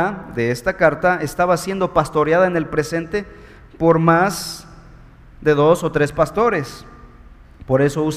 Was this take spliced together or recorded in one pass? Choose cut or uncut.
uncut